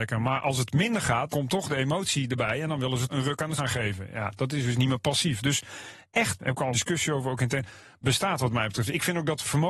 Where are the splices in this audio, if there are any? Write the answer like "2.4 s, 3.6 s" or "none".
1.3 s, 3.1 s, 3.6 s, 6.4 s, 6.7 s

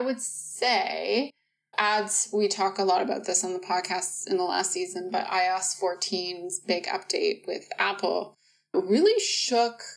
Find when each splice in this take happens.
none

